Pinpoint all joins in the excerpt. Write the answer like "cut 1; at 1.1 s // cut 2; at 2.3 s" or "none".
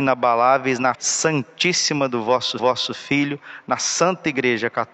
cut 1; at 0.9 s // cut 2; at 2.6 s